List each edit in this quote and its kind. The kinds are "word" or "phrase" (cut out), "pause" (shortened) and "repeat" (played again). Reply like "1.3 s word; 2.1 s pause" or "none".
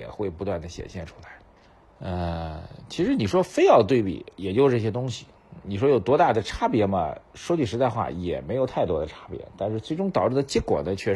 none